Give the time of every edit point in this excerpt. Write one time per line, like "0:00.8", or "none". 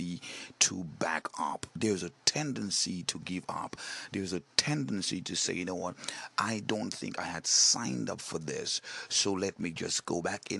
none